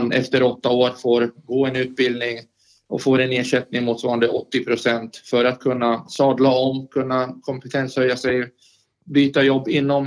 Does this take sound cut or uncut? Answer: uncut